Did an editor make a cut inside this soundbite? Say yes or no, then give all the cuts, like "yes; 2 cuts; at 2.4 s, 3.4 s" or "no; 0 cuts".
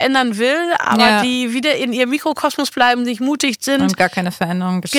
no; 0 cuts